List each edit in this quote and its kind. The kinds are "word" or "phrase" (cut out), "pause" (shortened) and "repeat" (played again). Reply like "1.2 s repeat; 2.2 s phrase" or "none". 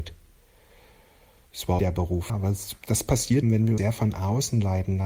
1.8 s word; 2.3 s word; 3.4 s word; 3.8 s word